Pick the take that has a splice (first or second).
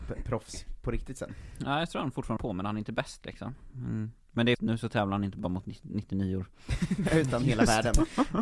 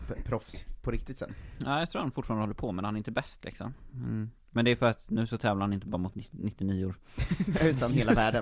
first